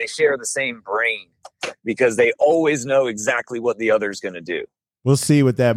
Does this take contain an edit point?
no; 0 cuts

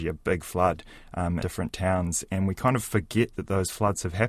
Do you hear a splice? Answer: yes; 1 cut; at 1.4 s

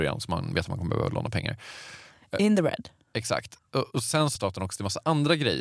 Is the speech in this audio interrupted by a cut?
yes; 1 cut; at 4.4 s

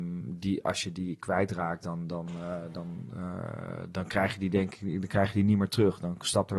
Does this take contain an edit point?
no; 0 cuts

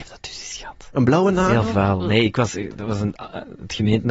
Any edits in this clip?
no; 0 cuts

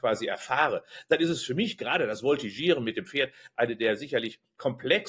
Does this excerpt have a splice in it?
no; 0 cuts

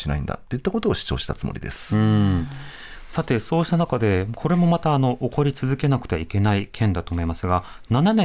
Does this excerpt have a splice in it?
no; 0 cuts

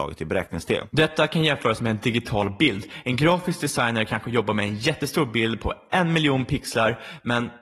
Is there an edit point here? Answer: no; 0 cuts

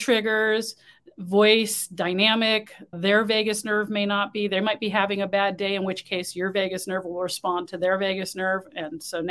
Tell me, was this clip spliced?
yes; 1 cut; at 2.9 s

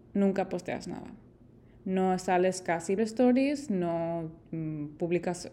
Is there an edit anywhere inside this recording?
yes; 1 cut; at 3.0 s

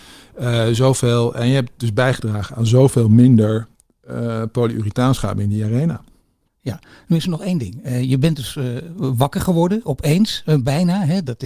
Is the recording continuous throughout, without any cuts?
yes; 0 cuts

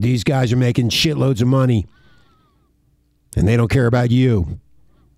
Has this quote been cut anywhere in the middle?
no; 0 cuts

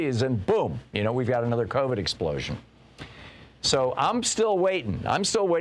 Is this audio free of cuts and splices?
yes; 0 cuts

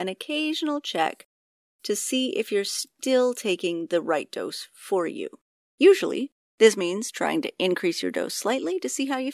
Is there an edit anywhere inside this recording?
no; 0 cuts

